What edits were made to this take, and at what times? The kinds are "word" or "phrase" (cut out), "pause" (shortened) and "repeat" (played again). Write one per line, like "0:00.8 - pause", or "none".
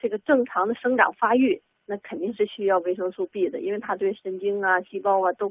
none